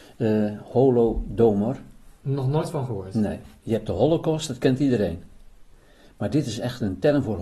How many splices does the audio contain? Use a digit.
0